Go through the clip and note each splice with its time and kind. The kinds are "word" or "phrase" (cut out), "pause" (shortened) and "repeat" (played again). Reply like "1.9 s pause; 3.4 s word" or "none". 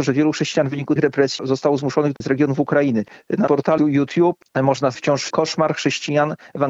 1.0 s word; 2.2 s word; 3.5 s word; 4.9 s word; 5.3 s word